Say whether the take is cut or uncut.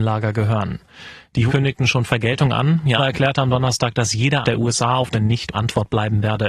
cut